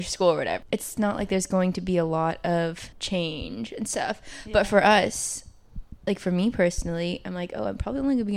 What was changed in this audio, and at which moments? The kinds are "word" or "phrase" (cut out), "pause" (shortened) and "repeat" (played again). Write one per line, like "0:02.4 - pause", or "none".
0:02.9 - pause
0:06.0 - pause